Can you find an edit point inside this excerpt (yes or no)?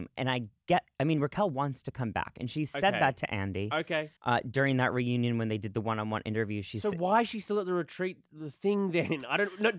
yes